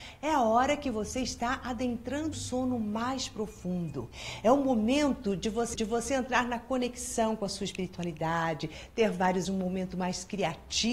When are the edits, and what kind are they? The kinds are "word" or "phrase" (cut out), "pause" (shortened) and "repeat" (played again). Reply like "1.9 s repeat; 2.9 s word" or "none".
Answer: 2.3 s word; 5.7 s repeat; 9.4 s word